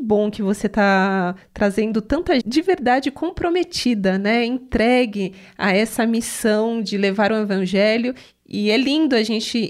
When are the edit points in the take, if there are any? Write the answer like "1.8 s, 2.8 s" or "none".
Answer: 2.4 s